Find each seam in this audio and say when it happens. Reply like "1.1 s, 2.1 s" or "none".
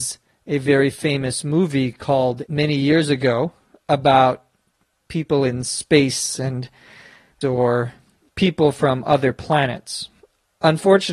2.5 s, 7.4 s